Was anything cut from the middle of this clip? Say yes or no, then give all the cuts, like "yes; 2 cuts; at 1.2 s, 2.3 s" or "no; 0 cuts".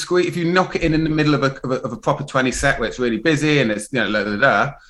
no; 0 cuts